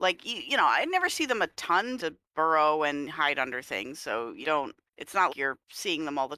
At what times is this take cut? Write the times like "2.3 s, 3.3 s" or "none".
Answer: 2.0 s, 4.4 s, 4.9 s, 5.3 s